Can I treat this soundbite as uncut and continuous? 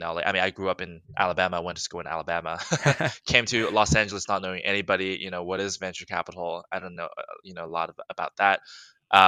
yes; 0 cuts

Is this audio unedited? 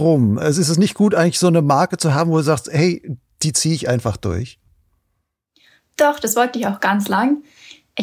yes; 0 cuts

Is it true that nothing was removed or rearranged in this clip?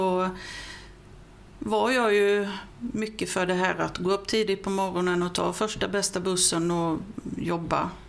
yes; 0 cuts

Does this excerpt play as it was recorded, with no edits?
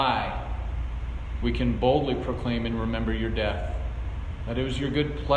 yes; 0 cuts

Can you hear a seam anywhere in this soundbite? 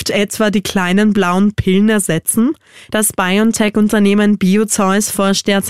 no; 0 cuts

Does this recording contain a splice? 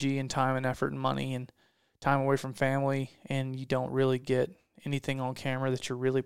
no; 0 cuts

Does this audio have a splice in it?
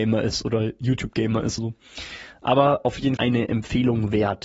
yes; 2 cuts; at 1.6 s, 3.2 s

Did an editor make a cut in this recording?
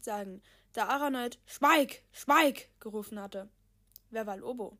yes; 1 cut; at 2.1 s

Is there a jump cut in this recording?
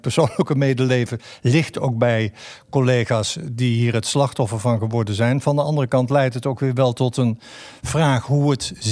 no; 0 cuts

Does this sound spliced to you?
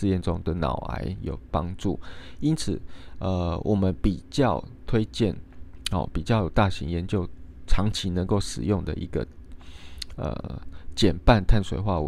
no; 0 cuts

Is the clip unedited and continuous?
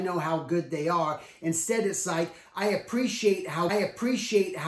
no; 1 cut; at 3.7 s

